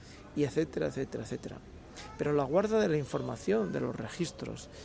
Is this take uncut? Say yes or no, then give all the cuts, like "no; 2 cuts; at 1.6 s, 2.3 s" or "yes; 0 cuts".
yes; 0 cuts